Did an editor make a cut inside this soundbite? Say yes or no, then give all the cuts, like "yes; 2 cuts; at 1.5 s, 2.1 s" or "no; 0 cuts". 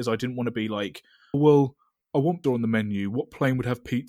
yes; 2 cuts; at 1.3 s, 2.4 s